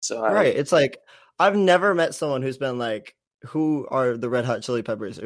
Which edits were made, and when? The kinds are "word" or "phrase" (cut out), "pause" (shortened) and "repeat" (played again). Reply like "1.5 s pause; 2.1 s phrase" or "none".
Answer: none